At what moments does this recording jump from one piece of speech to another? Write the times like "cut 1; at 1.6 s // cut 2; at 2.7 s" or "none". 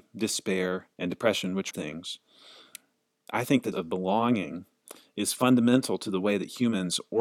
cut 1; at 0.9 s // cut 2; at 1.7 s // cut 3; at 3.7 s